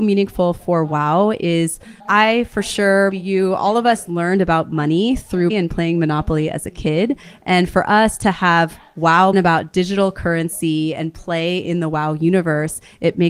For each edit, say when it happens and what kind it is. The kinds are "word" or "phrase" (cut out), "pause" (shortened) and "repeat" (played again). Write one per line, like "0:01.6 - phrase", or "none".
0:02.0 - pause
0:03.1 - word
0:05.5 - word
0:09.3 - phrase